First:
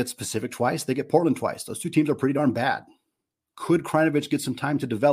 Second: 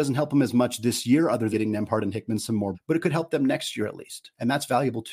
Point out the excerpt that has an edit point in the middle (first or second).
second